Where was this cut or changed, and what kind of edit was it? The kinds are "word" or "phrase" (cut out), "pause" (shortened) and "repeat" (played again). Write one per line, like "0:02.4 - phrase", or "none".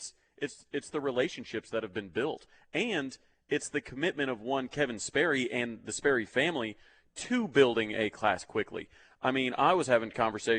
none